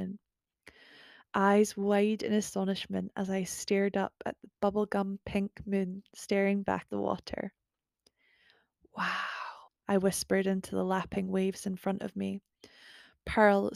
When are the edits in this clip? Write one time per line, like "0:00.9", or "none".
0:06.9
0:09.7